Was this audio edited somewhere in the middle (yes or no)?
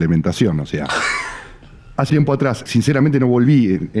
yes